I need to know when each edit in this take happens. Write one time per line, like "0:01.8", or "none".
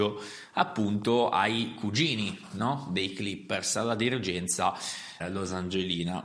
0:05.2